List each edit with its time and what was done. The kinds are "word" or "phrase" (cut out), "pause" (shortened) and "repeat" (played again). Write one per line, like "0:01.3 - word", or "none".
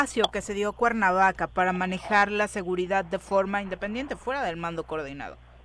none